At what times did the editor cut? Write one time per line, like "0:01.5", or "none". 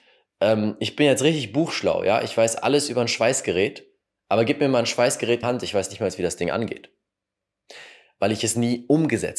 0:05.4